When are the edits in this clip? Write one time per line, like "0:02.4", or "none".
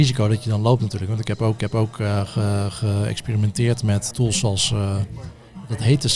0:01.6
0:04.1